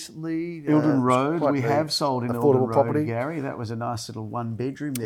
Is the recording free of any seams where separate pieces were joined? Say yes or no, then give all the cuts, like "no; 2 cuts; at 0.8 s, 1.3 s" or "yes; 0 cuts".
yes; 0 cuts